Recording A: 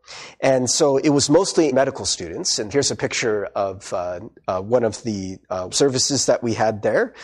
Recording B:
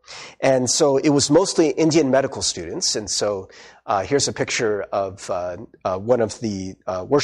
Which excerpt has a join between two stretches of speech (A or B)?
A